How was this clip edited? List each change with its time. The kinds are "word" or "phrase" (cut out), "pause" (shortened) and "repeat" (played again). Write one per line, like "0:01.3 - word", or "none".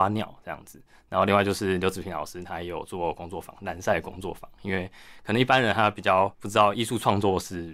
0:06.3 - pause